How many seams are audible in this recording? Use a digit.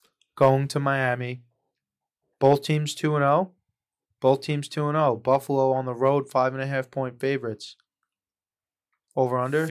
0